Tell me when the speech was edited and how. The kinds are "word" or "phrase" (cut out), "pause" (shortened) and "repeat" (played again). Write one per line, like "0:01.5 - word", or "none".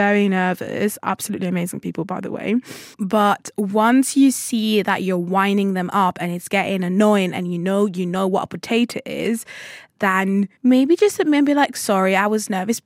0:02.9 - pause
0:10.6 - pause

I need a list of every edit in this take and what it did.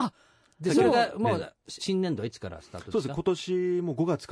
0:01.8 - word

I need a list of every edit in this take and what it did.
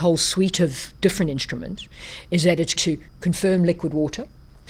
0:02.8 - word
0:03.1 - pause

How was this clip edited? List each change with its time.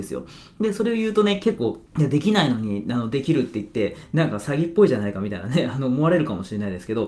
0:01.9 - pause

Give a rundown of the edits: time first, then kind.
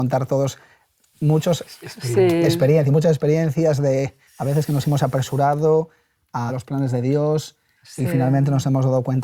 0:04.3 - pause
0:06.5 - word

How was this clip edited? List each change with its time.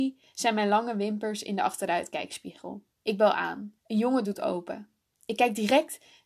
0:02.9 - pause
0:03.8 - pause
0:04.2 - word

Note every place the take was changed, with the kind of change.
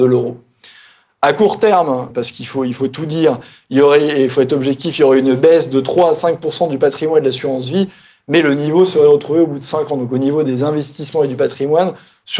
0:02.1 - word

